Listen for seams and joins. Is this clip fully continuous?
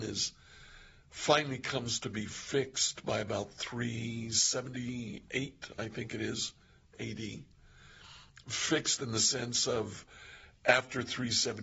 yes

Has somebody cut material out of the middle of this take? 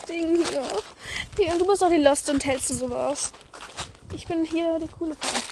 yes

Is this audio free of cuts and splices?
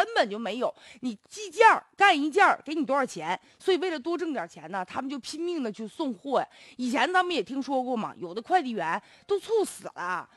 yes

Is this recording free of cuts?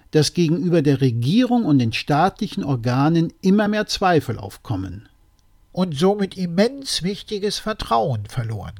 yes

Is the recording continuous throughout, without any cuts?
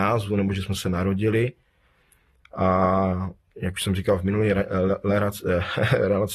yes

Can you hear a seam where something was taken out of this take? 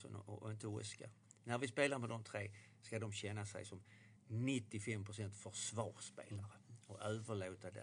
yes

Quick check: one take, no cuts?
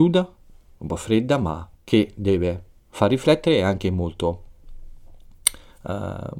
no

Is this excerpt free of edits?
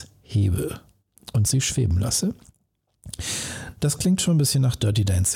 yes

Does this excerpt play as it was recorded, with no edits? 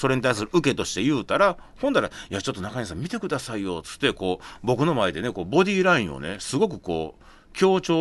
yes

